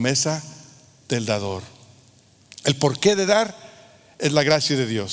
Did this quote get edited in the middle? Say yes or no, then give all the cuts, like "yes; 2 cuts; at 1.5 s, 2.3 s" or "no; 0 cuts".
no; 0 cuts